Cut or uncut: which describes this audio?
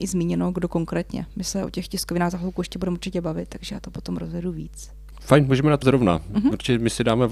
cut